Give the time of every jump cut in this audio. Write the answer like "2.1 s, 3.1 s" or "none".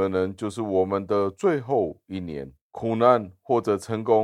2.6 s